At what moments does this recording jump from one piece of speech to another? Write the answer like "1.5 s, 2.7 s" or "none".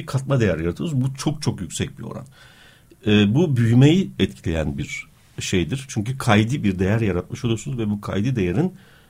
4.2 s